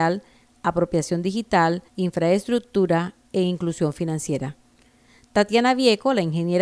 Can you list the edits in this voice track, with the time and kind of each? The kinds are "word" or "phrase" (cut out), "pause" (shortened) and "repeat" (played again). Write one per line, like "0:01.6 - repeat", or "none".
0:01.9 - pause